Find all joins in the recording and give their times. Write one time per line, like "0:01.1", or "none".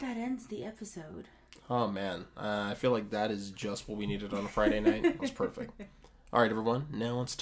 0:05.2